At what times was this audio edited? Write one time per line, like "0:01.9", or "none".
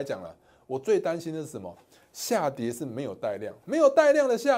none